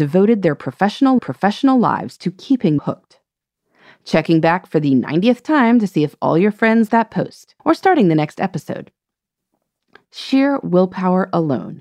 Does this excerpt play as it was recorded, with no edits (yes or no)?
no